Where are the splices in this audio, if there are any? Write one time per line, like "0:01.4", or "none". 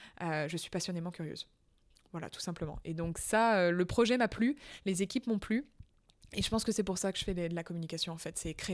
none